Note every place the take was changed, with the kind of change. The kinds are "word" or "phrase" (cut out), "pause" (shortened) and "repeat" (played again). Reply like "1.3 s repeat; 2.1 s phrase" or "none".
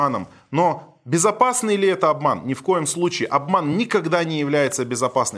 none